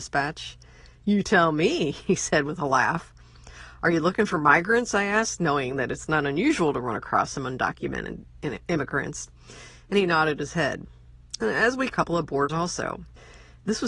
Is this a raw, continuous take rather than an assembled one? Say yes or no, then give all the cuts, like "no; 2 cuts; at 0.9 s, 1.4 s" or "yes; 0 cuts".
no; 2 cuts; at 11.9 s, 12.5 s